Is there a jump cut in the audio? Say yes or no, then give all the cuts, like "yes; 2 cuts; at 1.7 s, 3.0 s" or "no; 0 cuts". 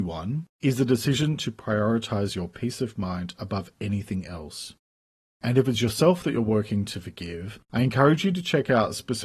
no; 0 cuts